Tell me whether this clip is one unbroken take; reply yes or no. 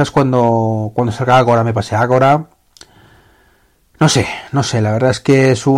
yes